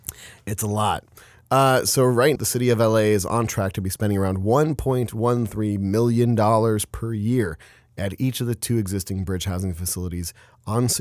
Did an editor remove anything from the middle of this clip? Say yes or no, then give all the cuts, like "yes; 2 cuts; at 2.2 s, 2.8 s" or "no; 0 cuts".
yes; 1 cut; at 2.4 s